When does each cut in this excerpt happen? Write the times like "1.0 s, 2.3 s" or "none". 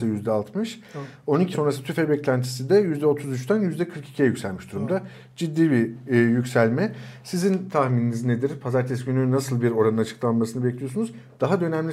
1.5 s